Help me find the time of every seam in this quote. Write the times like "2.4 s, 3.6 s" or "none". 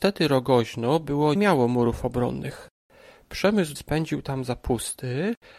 1.4 s, 3.8 s